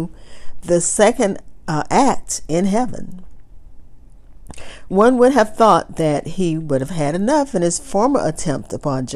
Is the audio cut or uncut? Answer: uncut